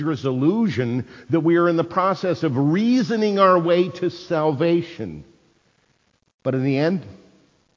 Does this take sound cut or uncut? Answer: uncut